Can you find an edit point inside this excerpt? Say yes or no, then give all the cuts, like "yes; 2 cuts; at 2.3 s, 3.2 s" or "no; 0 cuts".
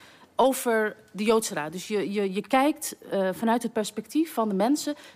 no; 0 cuts